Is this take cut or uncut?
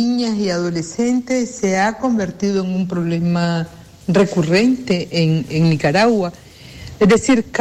uncut